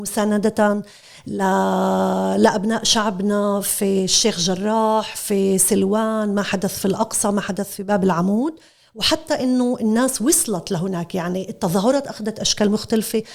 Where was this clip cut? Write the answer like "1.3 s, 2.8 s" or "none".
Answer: none